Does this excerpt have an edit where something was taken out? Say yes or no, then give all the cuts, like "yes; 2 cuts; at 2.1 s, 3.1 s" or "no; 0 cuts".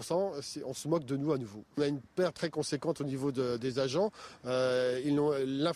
yes; 1 cut; at 2.3 s